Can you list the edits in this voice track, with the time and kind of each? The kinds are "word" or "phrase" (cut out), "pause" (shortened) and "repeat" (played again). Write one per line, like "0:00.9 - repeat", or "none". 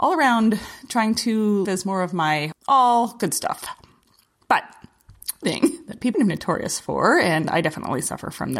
0:01.6 - word
0:02.5 - phrase
0:05.4 - word
0:06.1 - phrase

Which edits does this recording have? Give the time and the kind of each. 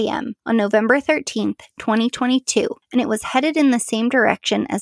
none

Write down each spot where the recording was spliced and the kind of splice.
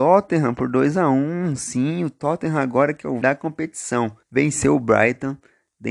0:03.2 - word
0:04.2 - pause

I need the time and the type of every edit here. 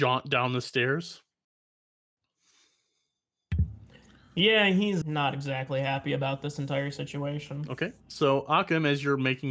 0:05.0 - word

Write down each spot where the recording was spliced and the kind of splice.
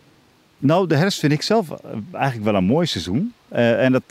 none

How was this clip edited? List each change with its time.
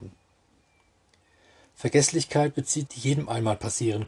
0:02.9 - phrase

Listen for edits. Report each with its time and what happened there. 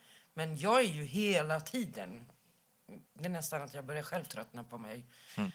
0:03.1 - pause

